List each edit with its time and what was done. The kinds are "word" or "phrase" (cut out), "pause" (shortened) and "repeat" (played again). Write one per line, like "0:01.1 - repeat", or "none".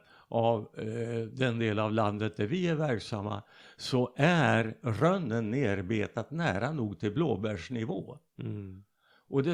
none